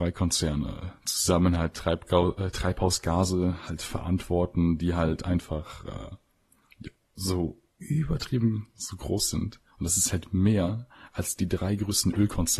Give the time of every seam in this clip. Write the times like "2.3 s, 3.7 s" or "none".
7.7 s